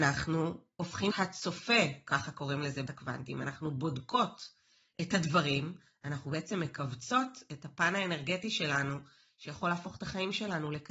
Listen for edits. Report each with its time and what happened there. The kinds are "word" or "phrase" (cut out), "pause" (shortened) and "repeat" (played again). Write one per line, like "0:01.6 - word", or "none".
0:01.1 - word
0:02.9 - word